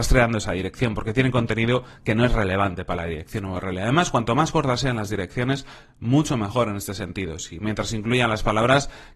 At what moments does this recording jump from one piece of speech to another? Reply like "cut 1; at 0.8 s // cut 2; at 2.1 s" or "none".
none